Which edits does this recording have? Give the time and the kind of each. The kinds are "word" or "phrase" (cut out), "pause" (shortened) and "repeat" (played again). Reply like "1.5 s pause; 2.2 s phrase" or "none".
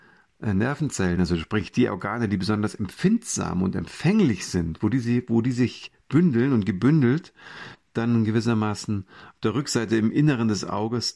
none